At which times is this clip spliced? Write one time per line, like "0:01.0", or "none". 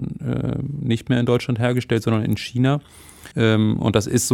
0:03.3